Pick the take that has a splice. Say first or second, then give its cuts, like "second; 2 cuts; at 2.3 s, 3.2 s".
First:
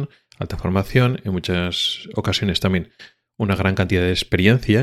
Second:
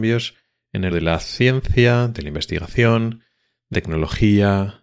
second; 2 cuts; at 0.9 s, 3.7 s